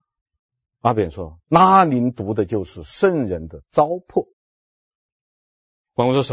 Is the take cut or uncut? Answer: cut